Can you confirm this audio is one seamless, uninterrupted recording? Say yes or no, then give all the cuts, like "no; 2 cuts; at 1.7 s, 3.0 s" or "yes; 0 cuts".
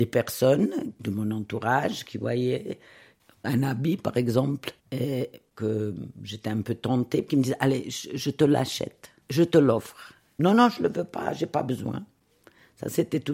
no; 3 cuts; at 3.3 s, 4.8 s, 9.2 s